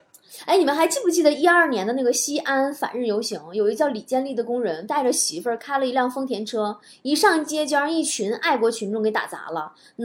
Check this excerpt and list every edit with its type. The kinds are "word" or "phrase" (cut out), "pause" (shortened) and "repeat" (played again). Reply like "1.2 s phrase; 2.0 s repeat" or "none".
none